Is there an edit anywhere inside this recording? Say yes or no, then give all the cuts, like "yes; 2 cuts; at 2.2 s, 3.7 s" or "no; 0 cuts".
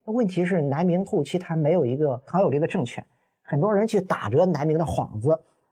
no; 0 cuts